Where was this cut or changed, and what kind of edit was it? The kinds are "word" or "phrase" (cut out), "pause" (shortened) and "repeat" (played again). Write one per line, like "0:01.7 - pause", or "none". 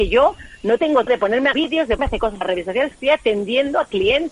0:01.1 - word
0:01.5 - word
0:02.0 - word
0:02.4 - word
0:02.9 - word